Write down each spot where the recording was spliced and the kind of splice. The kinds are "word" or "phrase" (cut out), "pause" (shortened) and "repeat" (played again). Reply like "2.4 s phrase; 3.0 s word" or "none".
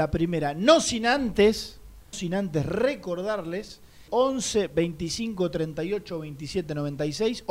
2.1 s word; 4.1 s word